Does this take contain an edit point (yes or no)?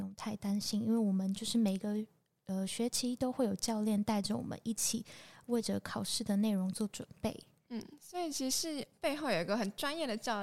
no